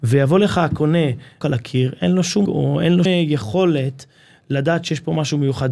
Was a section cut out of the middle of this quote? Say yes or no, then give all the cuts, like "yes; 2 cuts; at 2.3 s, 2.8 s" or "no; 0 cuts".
yes; 3 cuts; at 1.4 s, 2.5 s, 3.1 s